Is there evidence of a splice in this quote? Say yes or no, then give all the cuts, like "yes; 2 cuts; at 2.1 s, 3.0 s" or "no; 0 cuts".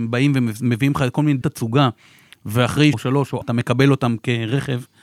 yes; 3 cuts; at 1.4 s, 2.9 s, 3.4 s